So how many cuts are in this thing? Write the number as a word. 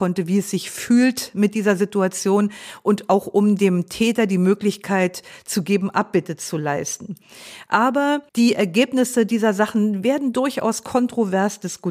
one